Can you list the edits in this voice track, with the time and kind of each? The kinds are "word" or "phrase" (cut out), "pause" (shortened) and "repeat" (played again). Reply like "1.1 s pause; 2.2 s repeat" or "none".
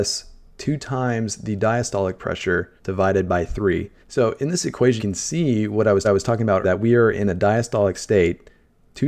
2.8 s pause; 4.0 s pause; 5.0 s word; 6.0 s repeat; 6.6 s word